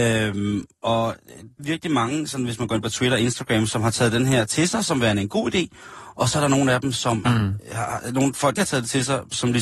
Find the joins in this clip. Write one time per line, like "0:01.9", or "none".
0:01.6
0:07.3
0:08.6